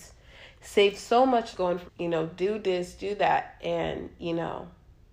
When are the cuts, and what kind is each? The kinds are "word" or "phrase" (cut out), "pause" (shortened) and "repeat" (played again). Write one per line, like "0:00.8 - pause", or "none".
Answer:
0:01.5 - phrase
0:01.9 - phrase